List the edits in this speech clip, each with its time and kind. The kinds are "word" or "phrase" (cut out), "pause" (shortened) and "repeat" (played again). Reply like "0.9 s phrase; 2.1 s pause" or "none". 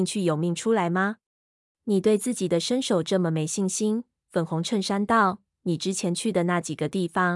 1.3 s pause